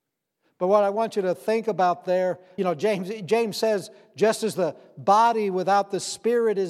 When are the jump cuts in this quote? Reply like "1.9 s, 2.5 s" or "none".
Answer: 2.6 s